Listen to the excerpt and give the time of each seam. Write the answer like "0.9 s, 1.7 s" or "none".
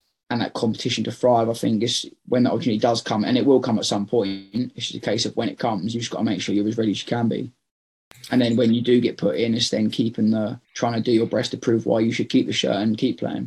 10.6 s